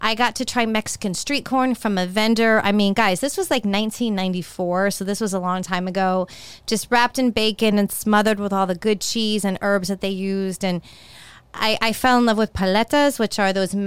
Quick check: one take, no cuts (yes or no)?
yes